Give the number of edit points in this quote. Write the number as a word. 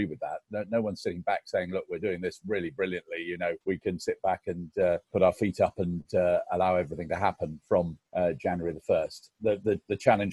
three